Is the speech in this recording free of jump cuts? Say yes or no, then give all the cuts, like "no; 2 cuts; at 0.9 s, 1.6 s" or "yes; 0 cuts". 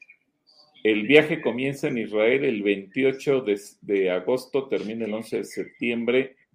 yes; 0 cuts